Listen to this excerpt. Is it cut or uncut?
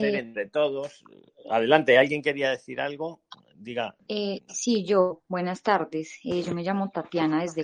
cut